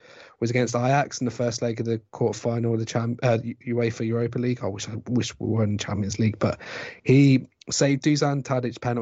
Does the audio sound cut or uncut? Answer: uncut